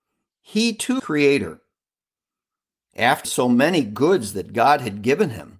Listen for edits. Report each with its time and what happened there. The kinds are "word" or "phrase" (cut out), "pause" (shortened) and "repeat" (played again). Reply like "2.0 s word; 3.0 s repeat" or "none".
1.0 s phrase; 3.2 s word

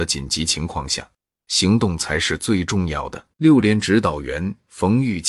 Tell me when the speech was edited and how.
3.3 s pause

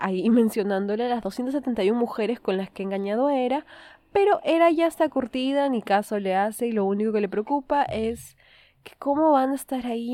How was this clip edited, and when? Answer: none

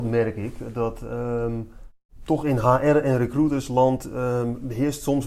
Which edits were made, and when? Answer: none

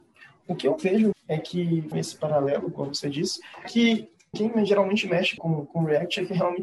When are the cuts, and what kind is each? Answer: 1.1 s word; 1.9 s word; 3.6 s word; 4.3 s word; 5.4 s word

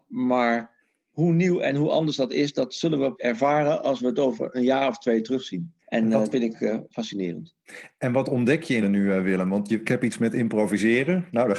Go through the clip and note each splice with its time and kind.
3.1 s word; 5.8 s pause; 6.3 s word; 8.8 s phrase; 9.8 s phrase

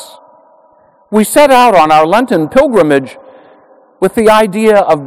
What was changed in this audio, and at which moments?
none

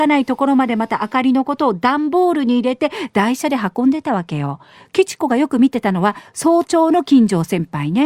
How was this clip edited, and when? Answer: none

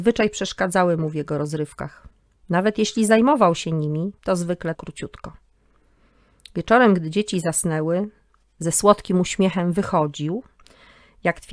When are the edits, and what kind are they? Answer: 2.2 s pause; 4.2 s pause; 4.7 s phrase

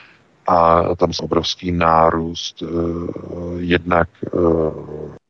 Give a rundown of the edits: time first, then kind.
1.2 s word

